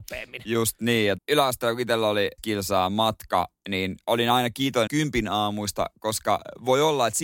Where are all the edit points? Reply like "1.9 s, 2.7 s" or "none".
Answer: 1.2 s, 2.4 s, 4.9 s